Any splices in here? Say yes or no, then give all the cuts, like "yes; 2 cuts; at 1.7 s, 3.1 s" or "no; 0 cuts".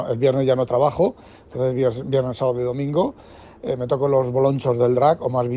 no; 0 cuts